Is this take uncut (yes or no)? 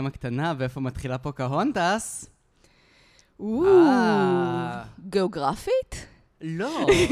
yes